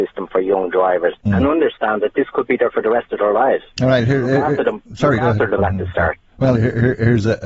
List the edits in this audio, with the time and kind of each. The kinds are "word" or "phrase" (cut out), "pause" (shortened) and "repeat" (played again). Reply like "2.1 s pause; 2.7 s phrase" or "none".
1.2 s pause; 2.7 s word; 4.8 s pause; 5.6 s word; 6.5 s word